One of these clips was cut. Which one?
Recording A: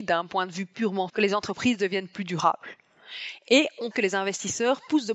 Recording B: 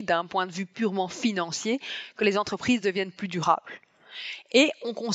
A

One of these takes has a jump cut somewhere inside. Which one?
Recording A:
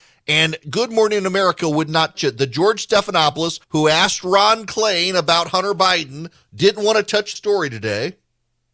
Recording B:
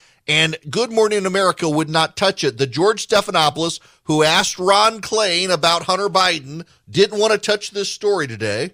A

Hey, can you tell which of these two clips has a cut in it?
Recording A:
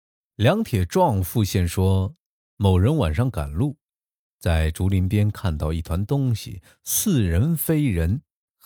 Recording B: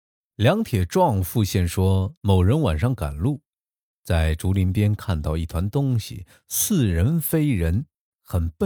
B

